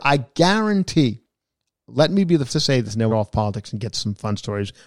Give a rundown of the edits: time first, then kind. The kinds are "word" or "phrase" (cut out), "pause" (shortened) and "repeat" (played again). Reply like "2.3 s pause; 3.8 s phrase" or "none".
2.5 s word; 3.1 s phrase